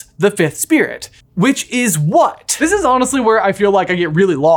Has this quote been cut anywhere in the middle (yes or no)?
yes